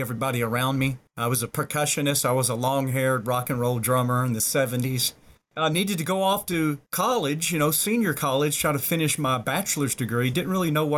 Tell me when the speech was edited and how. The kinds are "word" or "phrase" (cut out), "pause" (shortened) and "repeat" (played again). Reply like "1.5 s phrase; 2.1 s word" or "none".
1.1 s pause